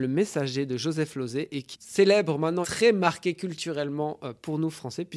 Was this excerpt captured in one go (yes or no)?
no